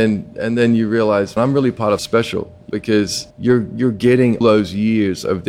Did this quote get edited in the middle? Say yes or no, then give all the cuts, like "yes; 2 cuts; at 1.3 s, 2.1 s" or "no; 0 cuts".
yes; 5 cuts; at 1.4 s, 2.0 s, 2.7 s, 3.3 s, 4.4 s